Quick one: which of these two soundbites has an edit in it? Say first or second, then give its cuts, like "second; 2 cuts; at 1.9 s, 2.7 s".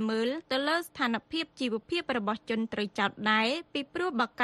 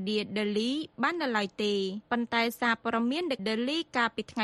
second; 1 cut; at 3.4 s